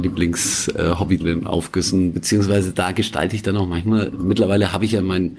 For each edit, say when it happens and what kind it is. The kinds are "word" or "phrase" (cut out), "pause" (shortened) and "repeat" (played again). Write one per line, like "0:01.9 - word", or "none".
0:01.2 - word